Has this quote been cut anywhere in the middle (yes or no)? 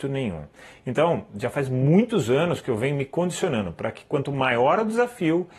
no